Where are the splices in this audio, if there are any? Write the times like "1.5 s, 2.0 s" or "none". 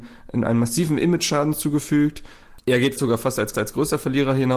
3.0 s, 3.5 s